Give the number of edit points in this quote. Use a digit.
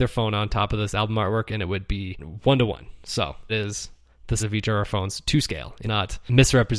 3